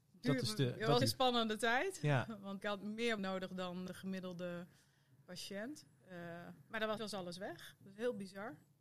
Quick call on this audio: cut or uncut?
cut